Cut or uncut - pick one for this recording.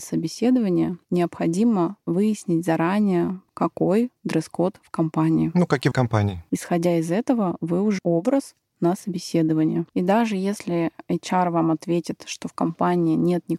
cut